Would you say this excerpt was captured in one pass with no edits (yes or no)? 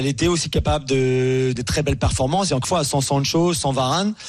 no